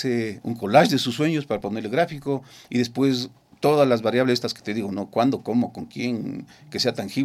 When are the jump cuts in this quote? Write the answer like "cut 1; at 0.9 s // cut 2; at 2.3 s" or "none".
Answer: none